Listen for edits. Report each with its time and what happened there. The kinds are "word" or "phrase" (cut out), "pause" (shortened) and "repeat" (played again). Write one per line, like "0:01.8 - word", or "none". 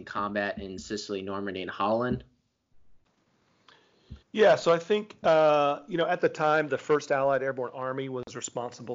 0:04.2 - pause